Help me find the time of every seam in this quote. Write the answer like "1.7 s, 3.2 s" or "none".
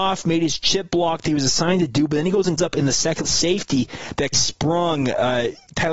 2.6 s, 3.2 s, 4.3 s

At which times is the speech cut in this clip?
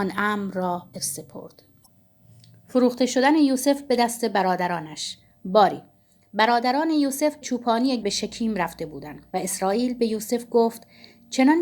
0.9 s, 7.4 s, 8.0 s, 9.3 s

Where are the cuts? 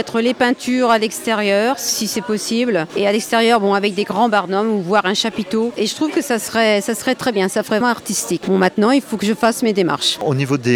7.8 s

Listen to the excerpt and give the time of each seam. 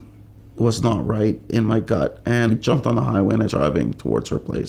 2.5 s, 3.5 s

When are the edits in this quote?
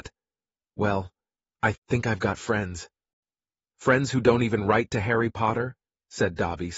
none

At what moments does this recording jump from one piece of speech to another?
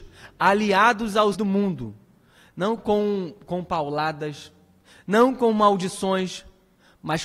1.3 s, 2.8 s

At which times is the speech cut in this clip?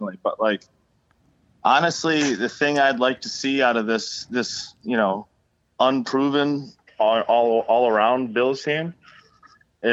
none

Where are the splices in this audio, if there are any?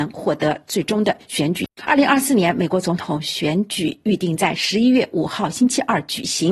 1.7 s

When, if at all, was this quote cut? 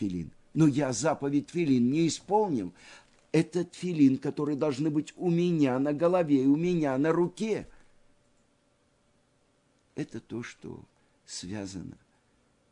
none

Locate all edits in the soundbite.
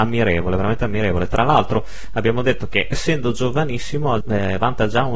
2.9 s, 4.2 s

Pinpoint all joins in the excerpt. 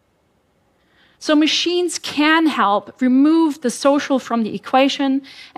none

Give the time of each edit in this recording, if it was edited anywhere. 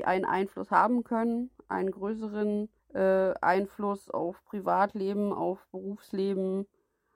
2.8 s

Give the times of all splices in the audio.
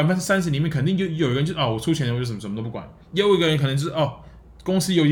3.0 s

